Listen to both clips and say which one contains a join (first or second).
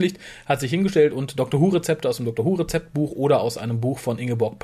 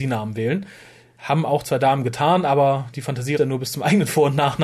second